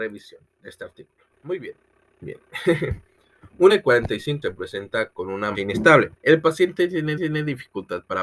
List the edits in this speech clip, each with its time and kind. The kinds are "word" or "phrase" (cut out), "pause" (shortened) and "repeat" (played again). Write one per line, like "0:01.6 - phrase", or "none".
0:01.3 - pause
0:02.2 - word
0:03.7 - word
0:04.4 - word
0:05.5 - word
0:06.2 - pause
0:07.2 - repeat